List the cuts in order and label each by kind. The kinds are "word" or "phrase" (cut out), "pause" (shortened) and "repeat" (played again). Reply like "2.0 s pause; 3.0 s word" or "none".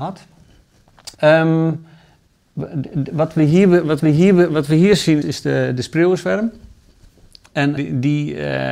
1.1 s pause; 4.0 s repeat; 5.2 s word; 7.8 s word